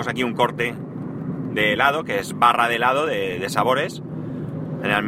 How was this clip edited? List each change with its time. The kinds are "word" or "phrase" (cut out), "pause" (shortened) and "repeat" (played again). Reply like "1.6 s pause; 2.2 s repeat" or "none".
none